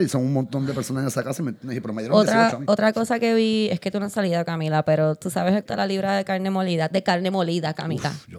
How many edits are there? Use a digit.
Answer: 1